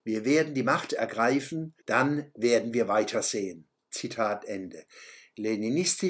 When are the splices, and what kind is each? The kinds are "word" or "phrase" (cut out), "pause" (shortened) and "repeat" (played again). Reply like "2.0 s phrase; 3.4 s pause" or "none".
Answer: 1.8 s pause; 3.8 s pause